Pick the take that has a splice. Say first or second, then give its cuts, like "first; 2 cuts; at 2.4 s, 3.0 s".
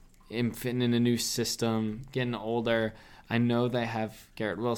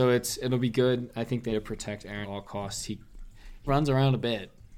second; 3 cuts; at 1.5 s, 2.2 s, 3.7 s